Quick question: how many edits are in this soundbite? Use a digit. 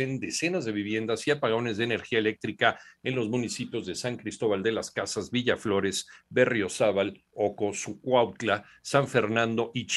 0